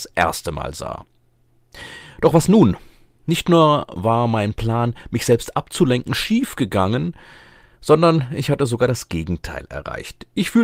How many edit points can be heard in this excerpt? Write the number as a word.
zero